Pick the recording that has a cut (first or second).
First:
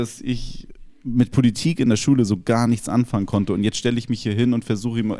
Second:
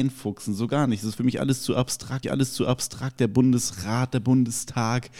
second